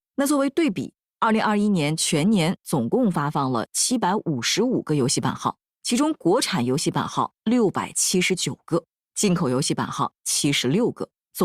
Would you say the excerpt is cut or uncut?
uncut